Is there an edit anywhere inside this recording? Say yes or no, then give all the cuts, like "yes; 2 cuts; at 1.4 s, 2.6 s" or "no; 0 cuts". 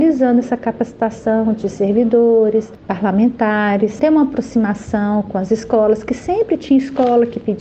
no; 0 cuts